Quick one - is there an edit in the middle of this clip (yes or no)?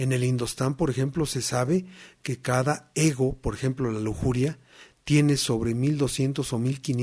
no